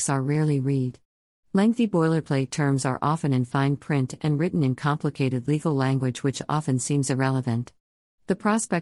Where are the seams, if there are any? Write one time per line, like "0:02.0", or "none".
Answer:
none

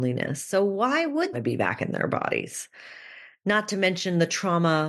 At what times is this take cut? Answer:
0:01.3

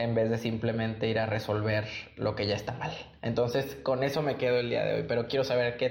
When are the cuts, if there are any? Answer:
none

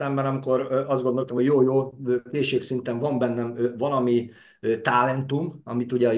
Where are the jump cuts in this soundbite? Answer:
none

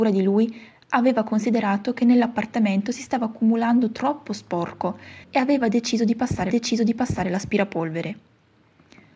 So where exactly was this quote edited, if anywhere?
0:05.2
0:06.5

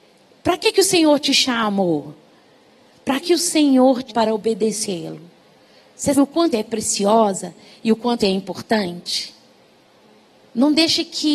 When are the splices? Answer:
0:03.2
0:04.1
0:06.1
0:06.5
0:08.2

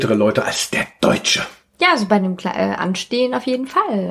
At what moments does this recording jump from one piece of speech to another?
none

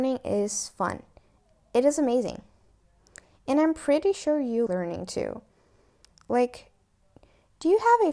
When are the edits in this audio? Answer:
0:04.7

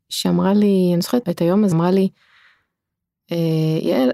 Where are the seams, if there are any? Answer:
0:01.2
0:01.7

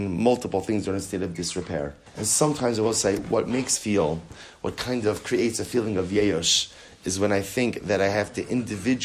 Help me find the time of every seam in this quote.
0:02.1
0:03.8

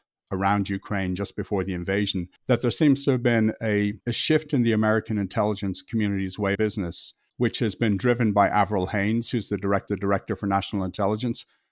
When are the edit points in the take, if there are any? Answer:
0:02.4
0:04.0
0:06.5
0:07.3
0:09.9

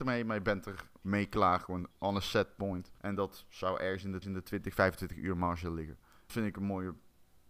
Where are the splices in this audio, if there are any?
0:01.0
0:01.9
0:03.0
0:04.2
0:06.3

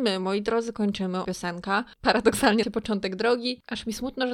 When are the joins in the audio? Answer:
0:01.2
0:02.6

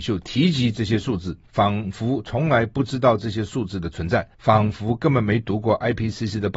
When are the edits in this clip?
0:01.5
0:04.3

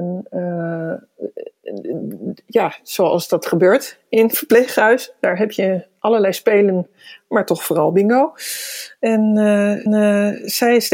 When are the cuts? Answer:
0:09.9

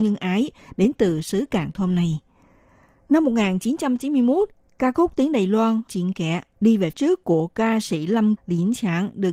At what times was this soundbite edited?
0:05.9
0:06.9
0:08.4

